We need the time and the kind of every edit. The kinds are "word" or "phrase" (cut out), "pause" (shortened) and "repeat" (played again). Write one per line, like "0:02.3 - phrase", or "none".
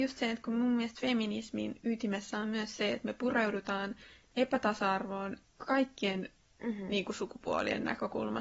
none